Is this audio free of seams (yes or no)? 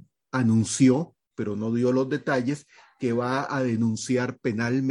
yes